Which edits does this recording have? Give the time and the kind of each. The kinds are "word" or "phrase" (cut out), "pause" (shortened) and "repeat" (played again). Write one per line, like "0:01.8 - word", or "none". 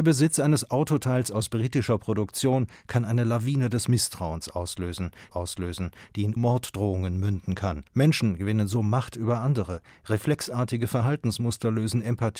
0:05.3 - repeat
0:06.4 - word
0:07.9 - pause